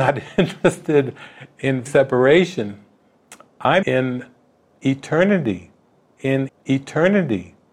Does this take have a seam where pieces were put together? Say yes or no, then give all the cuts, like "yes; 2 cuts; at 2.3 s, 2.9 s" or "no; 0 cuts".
yes; 3 cuts; at 1.9 s, 3.8 s, 6.5 s